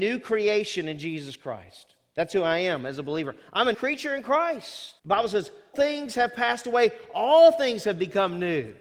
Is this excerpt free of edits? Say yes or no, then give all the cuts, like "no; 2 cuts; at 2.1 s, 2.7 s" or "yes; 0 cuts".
no; 3 cuts; at 3.7 s, 5.0 s, 5.7 s